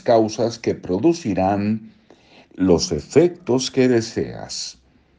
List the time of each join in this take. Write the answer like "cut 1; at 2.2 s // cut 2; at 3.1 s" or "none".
none